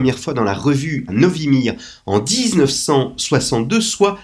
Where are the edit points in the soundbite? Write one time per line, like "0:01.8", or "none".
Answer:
0:01.1